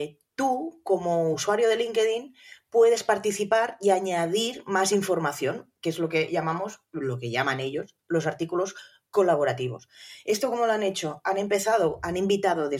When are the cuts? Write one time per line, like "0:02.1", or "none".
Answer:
none